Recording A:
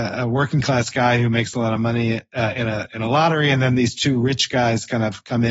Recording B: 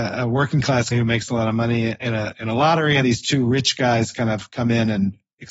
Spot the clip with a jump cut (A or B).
B